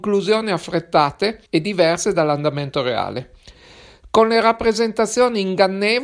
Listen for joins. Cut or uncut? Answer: cut